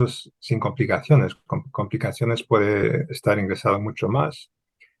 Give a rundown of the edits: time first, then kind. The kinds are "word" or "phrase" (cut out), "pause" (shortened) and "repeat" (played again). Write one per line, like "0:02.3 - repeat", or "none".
none